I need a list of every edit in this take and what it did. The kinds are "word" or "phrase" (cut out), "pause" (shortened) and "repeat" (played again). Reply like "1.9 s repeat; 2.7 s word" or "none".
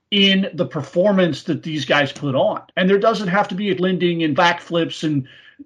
2.7 s pause; 3.8 s word; 4.4 s word